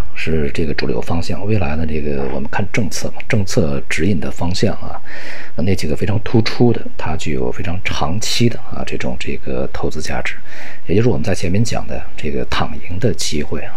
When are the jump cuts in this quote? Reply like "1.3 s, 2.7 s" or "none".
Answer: 5.6 s